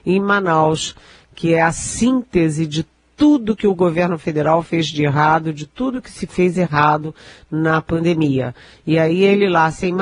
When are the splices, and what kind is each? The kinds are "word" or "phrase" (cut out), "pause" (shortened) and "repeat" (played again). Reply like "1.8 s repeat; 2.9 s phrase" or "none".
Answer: none